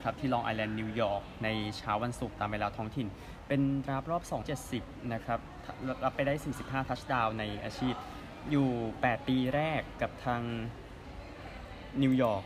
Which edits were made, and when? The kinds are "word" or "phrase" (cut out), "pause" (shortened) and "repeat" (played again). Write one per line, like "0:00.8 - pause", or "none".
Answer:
0:04.4 - phrase